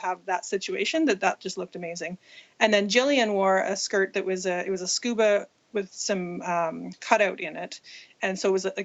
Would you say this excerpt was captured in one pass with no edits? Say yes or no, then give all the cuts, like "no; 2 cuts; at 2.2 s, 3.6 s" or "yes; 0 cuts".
yes; 0 cuts